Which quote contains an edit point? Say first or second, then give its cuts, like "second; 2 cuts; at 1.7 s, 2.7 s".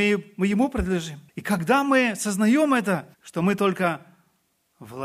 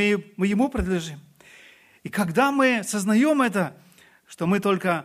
first; 2 cuts; at 1.3 s, 3.1 s